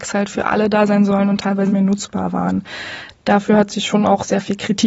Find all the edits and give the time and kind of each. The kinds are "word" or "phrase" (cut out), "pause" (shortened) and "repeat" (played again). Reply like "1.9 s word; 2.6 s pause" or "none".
1.7 s word